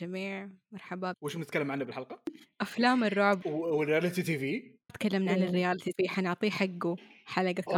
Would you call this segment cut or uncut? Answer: cut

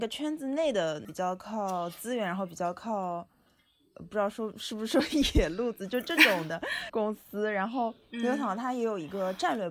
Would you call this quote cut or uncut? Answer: uncut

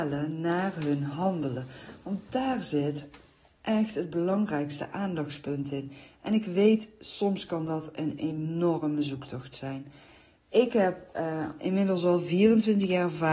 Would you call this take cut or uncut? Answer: uncut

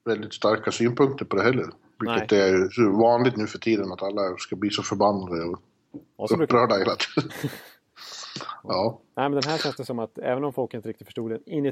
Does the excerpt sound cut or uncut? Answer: uncut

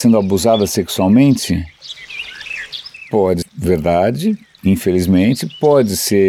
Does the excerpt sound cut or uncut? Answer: cut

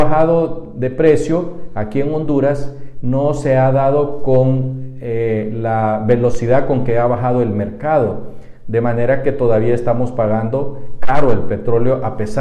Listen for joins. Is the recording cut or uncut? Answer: uncut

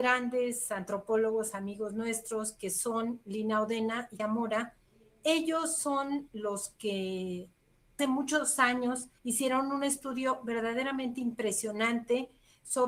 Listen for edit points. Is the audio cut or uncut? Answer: cut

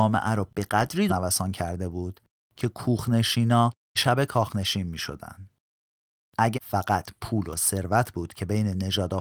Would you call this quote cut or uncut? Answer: cut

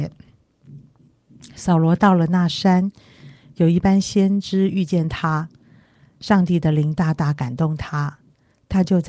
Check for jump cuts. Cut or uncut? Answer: uncut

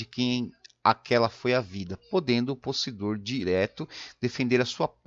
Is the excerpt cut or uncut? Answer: uncut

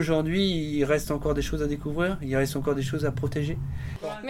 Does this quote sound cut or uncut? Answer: uncut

